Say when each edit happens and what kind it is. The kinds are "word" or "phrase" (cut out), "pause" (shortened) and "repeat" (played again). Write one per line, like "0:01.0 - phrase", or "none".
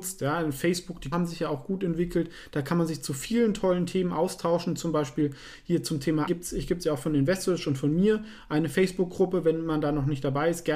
0:01.1 - word
0:06.3 - word